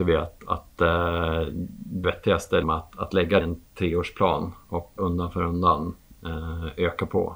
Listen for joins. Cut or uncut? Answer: cut